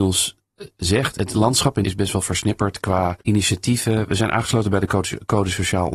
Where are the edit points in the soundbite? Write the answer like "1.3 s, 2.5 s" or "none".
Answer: 1.2 s, 1.8 s, 3.2 s